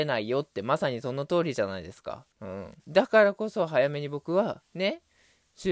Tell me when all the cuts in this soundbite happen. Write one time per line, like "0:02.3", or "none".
0:02.3
0:02.8